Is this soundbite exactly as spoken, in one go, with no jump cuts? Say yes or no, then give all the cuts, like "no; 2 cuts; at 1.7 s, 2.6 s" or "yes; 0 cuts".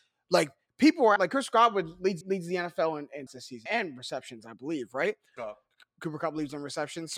no; 5 cuts; at 1.2 s, 2.2 s, 3.3 s, 3.7 s, 5.4 s